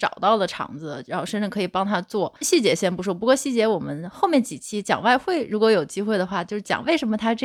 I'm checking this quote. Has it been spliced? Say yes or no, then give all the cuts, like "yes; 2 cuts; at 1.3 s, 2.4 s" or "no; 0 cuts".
yes; 1 cut; at 2.4 s